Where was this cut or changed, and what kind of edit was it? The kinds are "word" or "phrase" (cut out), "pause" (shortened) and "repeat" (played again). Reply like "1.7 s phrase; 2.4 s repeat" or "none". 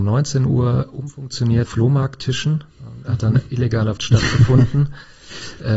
1.6 s word; 4.0 s word